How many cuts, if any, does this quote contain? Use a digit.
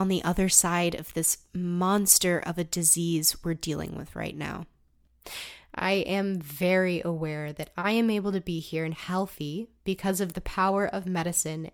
0